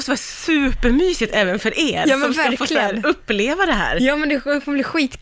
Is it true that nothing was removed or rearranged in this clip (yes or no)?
yes